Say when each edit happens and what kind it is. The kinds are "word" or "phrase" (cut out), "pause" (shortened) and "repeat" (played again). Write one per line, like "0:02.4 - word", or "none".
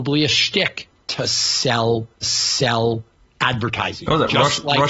0:02.2 - repeat